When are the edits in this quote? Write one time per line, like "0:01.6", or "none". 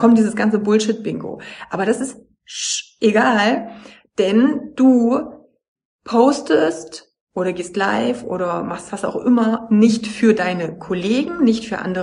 none